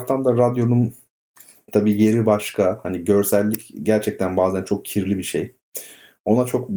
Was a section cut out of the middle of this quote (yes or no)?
no